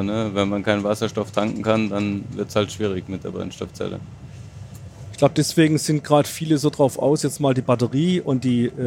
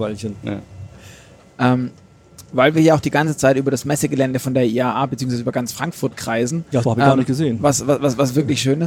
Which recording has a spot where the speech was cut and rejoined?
second; 1 cut; at 6.8 s

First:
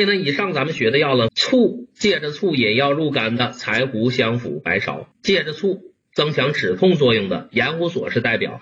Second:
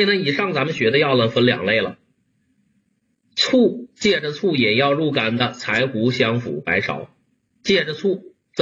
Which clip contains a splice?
first; 2 cuts; at 1.3 s, 5.1 s

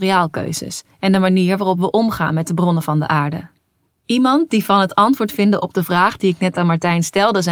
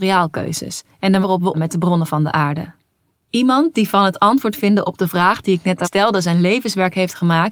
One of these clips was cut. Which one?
second; 3 cuts; at 1.2 s, 1.5 s, 5.8 s

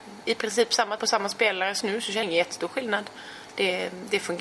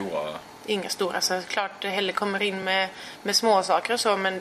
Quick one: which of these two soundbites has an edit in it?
first; 3 cuts; at 1.0 s, 1.8 s, 2.2 s

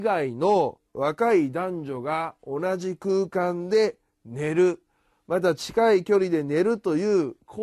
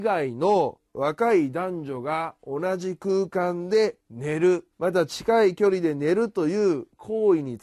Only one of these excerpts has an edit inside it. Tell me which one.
second; 2 cuts; at 4.0 s, 4.7 s

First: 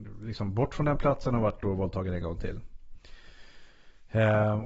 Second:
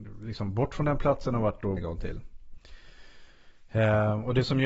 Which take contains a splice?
second; 1 cut; at 1.8 s

